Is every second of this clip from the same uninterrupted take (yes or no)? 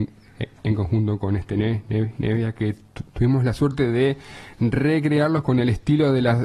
yes